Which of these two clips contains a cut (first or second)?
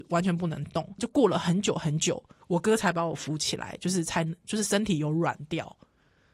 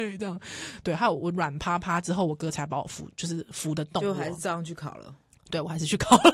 first